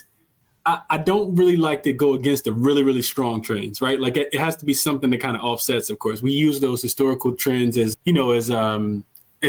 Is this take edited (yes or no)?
yes